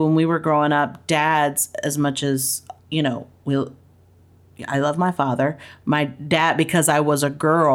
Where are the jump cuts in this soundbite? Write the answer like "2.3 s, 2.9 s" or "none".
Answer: 2.8 s